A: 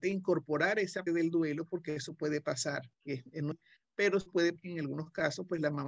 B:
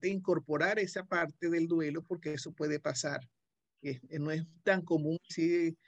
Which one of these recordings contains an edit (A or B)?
A